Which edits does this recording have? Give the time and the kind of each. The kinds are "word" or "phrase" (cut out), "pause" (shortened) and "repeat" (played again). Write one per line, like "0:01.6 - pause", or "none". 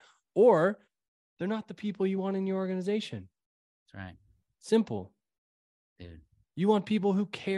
none

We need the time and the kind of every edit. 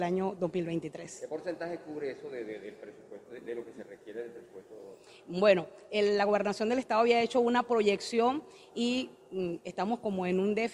none

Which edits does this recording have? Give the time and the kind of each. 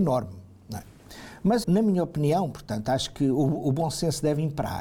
0:01.6 - word

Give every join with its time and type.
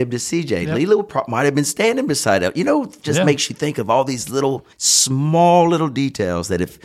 0:03.0 - word
0:04.7 - pause

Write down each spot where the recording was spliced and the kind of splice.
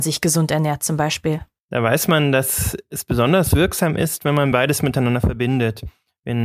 none

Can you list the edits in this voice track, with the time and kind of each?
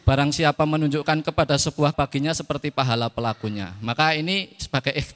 0:01.9 - phrase

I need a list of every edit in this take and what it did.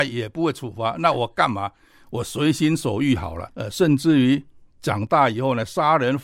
none

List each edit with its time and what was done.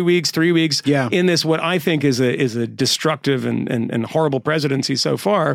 none

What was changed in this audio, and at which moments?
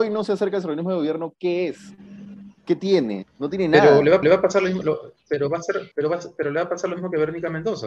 0:02.6 - pause
0:04.2 - repeat
0:05.9 - pause

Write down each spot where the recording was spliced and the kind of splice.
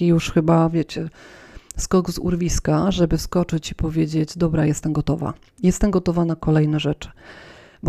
none

